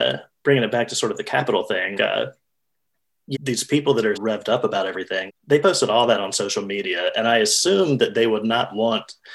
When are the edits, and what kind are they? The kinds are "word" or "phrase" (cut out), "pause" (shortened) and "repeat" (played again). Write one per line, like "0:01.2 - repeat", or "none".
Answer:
0:01.9 - word
0:03.3 - word
0:04.1 - word
0:05.3 - word